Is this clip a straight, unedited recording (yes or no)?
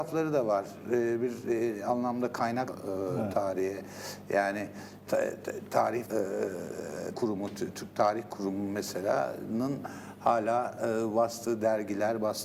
no